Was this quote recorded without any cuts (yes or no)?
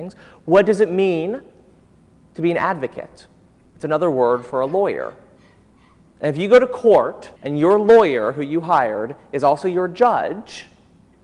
no